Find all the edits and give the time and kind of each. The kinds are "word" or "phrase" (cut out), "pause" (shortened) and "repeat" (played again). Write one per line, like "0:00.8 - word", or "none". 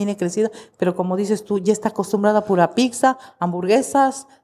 none